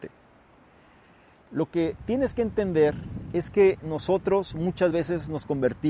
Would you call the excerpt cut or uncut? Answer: uncut